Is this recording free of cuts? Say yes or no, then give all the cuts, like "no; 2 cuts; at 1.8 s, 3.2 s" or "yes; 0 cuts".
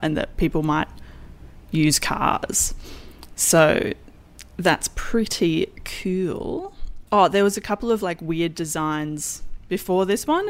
no; 1 cut; at 7.1 s